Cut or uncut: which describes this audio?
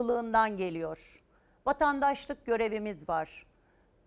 uncut